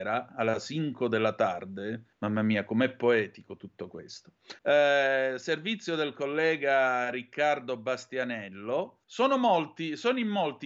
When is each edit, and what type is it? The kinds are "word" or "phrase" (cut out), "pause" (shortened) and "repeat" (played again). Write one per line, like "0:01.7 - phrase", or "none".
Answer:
0:02.1 - pause
0:04.6 - pause
0:09.0 - pause